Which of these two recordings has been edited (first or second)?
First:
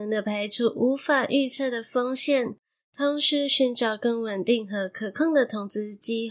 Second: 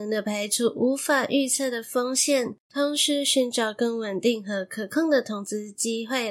second